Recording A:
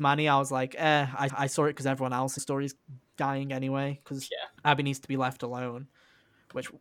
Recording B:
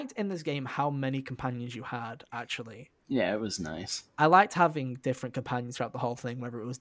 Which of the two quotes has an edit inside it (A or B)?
A